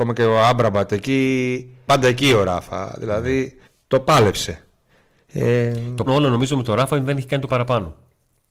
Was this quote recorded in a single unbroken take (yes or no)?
no